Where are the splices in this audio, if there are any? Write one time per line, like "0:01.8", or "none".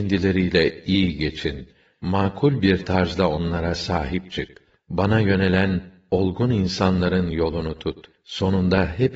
none